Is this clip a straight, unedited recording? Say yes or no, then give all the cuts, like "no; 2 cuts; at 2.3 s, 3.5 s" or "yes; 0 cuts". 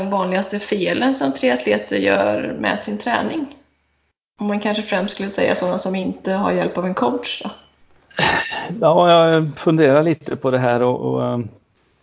no; 1 cut; at 11.0 s